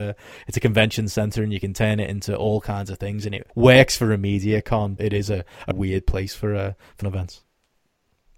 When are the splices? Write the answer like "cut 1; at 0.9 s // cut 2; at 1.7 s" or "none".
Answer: cut 1; at 3.5 s // cut 2; at 5.0 s // cut 3; at 5.7 s // cut 4; at 7.0 s